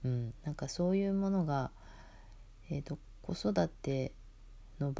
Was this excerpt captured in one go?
yes; 0 cuts

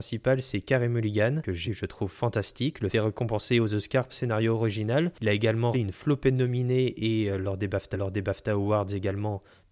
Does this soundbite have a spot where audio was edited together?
yes; 5 cuts; at 1.7 s, 2.9 s, 4.1 s, 5.7 s, 7.9 s

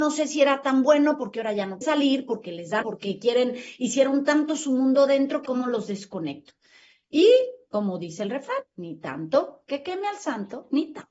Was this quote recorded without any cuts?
no; 3 cuts; at 1.8 s, 2.8 s, 5.5 s

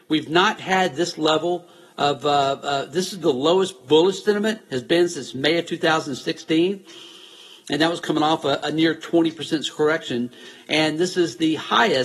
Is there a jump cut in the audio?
no; 0 cuts

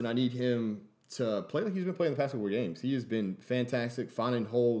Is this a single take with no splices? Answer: yes; 0 cuts

